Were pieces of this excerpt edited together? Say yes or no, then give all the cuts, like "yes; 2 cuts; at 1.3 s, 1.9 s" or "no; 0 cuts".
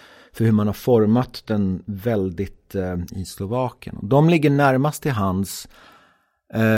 yes; 1 cut; at 3.1 s